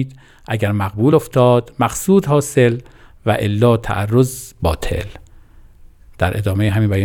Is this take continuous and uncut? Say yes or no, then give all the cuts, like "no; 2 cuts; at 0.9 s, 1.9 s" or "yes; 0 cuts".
yes; 0 cuts